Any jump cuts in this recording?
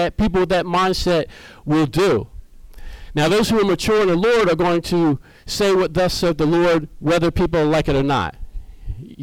no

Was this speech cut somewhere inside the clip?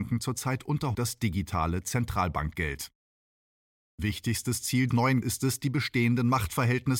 yes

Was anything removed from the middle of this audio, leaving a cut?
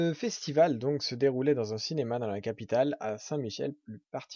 no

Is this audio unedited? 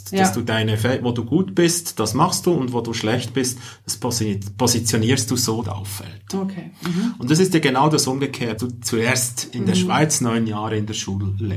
no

